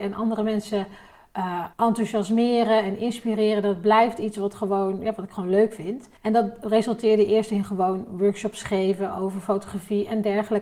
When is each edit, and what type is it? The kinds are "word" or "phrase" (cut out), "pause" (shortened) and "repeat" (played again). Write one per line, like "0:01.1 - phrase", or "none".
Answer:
0:01.7 - pause
0:06.2 - pause